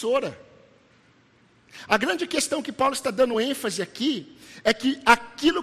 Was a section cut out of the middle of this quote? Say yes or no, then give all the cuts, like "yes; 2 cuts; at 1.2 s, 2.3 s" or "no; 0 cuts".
no; 0 cuts